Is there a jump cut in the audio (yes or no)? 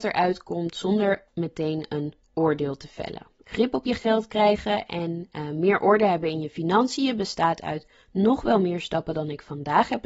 yes